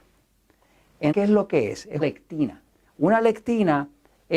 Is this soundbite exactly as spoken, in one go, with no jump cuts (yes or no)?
no